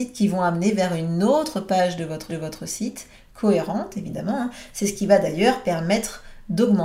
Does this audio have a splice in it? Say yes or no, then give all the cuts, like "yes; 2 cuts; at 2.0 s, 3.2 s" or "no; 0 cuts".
yes; 1 cut; at 2.3 s